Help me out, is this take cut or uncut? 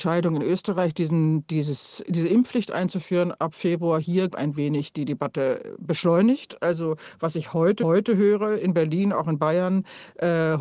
cut